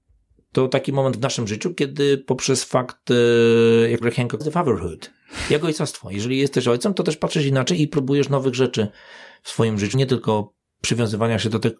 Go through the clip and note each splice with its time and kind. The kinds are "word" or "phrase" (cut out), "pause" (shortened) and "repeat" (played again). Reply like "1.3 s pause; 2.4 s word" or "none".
4.0 s phrase; 4.4 s phrase; 9.9 s word